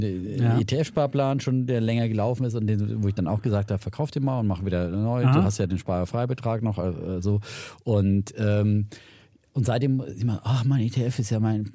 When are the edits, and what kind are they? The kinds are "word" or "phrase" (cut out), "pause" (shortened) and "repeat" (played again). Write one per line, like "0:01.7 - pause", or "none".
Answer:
none